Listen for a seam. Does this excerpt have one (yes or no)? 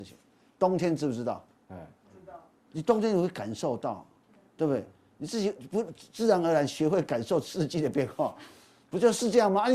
no